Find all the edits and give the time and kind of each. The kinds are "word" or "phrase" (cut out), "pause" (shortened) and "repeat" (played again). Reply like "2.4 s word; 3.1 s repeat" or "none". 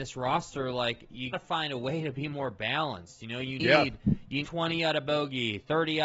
1.3 s word; 3.6 s word; 4.4 s word